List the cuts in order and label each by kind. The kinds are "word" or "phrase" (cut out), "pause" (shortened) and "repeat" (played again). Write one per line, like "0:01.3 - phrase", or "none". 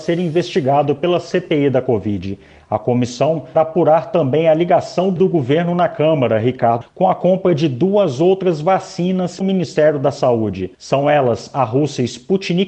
0:03.5 - word
0:05.2 - word
0:06.8 - word
0:09.4 - word
0:10.7 - pause